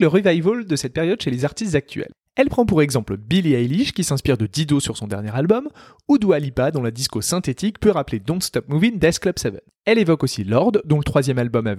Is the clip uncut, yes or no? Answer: yes